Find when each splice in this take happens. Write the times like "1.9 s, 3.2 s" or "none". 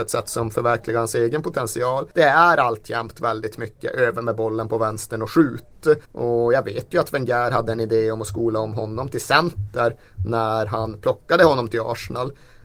2.1 s, 6.0 s